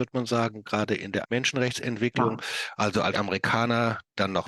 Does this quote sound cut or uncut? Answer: cut